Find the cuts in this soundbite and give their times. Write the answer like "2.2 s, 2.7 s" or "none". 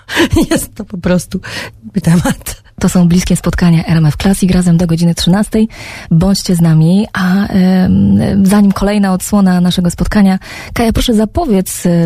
2.0 s